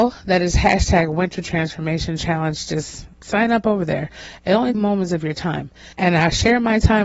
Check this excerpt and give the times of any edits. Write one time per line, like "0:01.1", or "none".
0:03.1
0:04.7
0:05.9